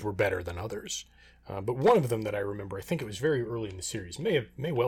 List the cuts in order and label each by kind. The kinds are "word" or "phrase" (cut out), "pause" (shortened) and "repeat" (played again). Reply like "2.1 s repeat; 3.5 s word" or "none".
none